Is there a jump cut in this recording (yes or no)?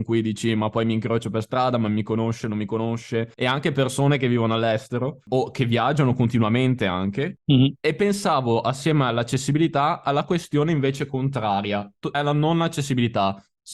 yes